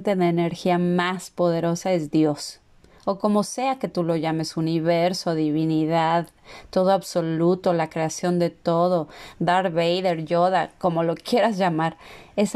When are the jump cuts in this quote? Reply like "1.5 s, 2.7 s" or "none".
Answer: none